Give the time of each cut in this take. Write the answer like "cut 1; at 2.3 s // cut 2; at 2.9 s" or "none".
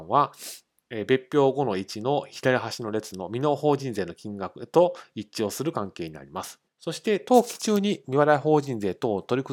cut 1; at 6.7 s